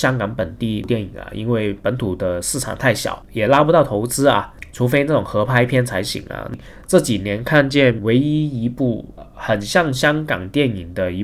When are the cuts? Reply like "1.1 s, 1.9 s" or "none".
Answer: 8.0 s